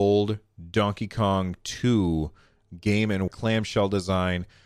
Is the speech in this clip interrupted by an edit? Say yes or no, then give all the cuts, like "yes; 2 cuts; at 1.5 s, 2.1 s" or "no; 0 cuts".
yes; 1 cut; at 3.3 s